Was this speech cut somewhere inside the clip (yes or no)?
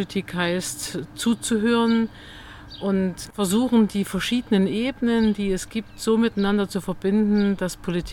no